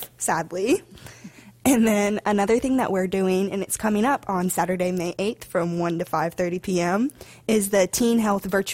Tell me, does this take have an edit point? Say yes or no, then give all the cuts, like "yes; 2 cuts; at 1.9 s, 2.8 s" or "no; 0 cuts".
no; 0 cuts